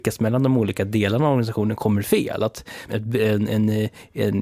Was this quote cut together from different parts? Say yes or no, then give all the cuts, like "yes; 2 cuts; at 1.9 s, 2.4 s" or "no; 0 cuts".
yes; 1 cut; at 2.9 s